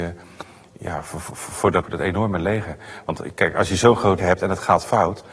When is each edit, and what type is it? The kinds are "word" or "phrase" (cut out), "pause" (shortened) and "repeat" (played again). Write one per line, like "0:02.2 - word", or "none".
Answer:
0:01.8 - word
0:04.2 - word